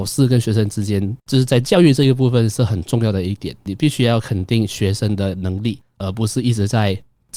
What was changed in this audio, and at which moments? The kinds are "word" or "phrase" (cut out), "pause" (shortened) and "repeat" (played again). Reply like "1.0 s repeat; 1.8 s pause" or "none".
1.2 s pause